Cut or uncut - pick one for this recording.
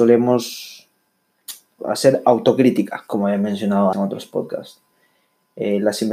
cut